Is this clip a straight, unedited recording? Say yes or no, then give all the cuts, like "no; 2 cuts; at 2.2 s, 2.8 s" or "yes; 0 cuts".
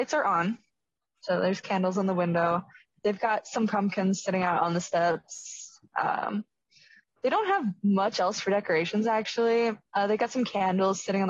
yes; 0 cuts